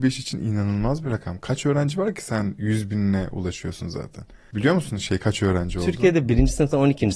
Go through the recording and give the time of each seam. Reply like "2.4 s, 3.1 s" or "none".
none